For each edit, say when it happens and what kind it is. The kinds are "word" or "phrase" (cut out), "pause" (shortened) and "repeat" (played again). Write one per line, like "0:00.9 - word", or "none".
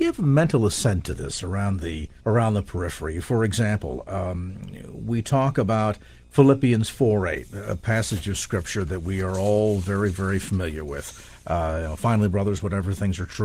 0:02.2 - pause